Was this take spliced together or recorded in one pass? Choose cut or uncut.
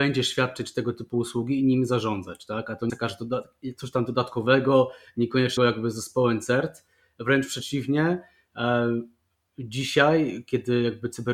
cut